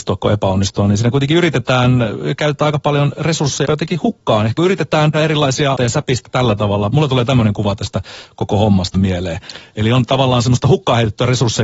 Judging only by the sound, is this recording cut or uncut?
cut